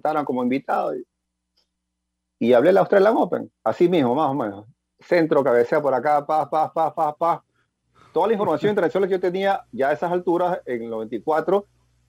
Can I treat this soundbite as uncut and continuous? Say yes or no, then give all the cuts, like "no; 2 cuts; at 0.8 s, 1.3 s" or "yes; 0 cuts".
yes; 0 cuts